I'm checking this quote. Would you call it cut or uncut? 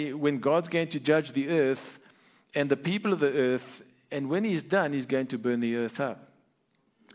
uncut